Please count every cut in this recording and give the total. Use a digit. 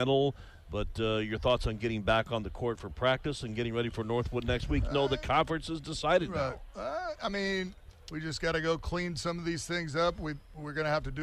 1